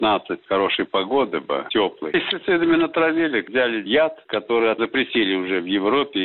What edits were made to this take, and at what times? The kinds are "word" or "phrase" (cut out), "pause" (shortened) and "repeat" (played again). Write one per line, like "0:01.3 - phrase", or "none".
0:03.8 - word